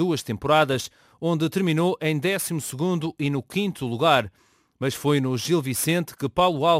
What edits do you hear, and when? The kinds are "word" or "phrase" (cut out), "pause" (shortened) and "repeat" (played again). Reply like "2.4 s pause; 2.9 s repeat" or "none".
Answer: none